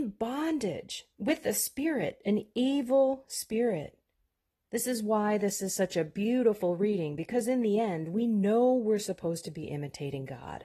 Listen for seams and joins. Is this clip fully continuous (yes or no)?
no